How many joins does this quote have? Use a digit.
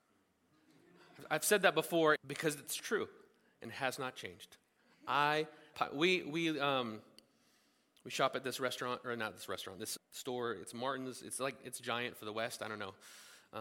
3